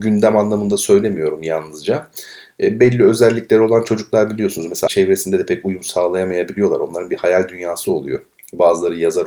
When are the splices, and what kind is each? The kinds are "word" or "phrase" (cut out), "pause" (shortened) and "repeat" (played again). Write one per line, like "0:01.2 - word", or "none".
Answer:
0:04.9 - word